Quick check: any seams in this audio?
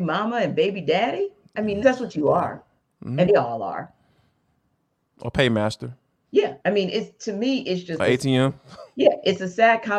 yes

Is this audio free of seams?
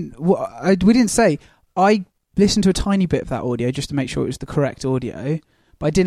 yes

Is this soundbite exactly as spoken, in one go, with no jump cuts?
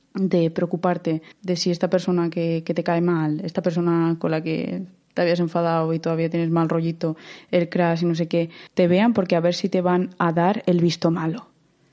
no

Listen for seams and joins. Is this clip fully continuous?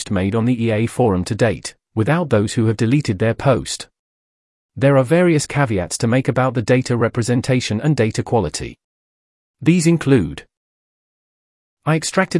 yes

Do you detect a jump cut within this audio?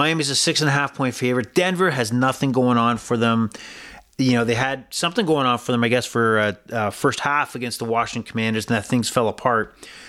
no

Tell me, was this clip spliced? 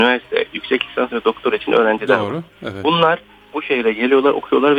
no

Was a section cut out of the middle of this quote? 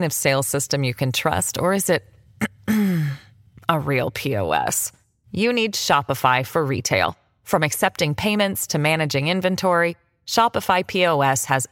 no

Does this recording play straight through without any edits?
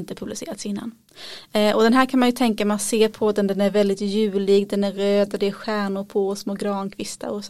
yes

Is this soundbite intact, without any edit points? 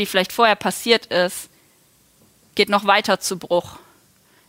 yes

